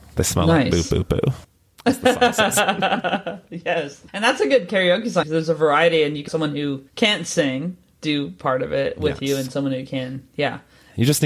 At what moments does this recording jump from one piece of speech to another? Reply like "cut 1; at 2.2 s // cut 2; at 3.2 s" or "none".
cut 1; at 1.4 s // cut 2; at 4.1 s // cut 3; at 5.2 s // cut 4; at 6.3 s // cut 5; at 6.9 s